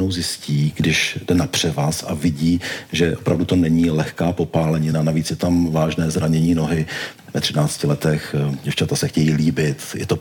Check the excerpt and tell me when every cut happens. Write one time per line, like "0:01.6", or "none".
none